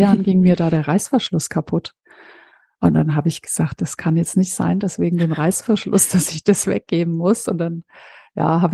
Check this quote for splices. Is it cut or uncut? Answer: uncut